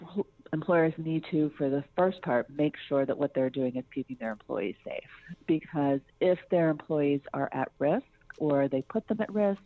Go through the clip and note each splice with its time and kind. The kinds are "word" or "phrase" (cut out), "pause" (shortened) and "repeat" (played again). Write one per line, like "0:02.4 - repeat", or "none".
none